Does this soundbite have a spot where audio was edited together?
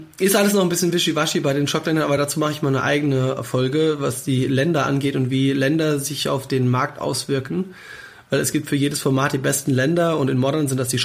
no; 0 cuts

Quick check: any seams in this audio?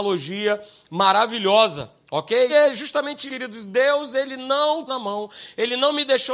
yes; 3 cuts; at 2.5 s, 3.3 s, 4.9 s

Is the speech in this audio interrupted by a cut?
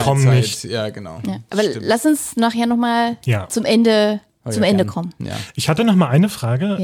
no; 0 cuts

